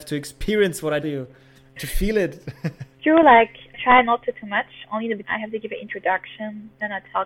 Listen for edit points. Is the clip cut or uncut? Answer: cut